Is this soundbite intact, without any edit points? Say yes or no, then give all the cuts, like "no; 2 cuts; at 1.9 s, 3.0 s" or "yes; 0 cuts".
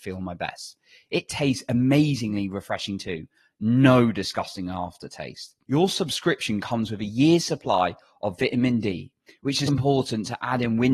no; 2 cuts; at 5.6 s, 9.7 s